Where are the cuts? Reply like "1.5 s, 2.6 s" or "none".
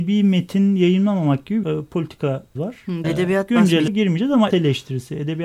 1.6 s, 2.6 s, 3.0 s, 3.9 s, 4.5 s